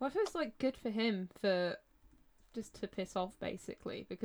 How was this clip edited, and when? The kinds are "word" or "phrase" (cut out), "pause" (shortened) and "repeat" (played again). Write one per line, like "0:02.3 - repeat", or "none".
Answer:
0:02.7 - phrase